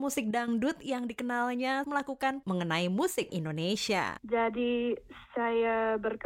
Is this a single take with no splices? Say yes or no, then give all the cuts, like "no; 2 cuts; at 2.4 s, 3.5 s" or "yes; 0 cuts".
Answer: no; 3 cuts; at 1.8 s, 2.4 s, 3.3 s